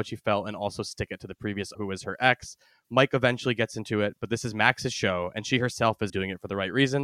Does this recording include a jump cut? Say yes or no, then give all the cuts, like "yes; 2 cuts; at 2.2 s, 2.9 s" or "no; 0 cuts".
yes; 2 cuts; at 1.7 s, 6.1 s